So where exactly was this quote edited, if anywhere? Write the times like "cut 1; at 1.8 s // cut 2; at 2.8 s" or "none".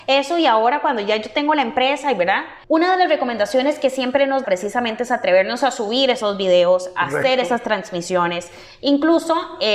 cut 1; at 2.6 s // cut 2; at 4.4 s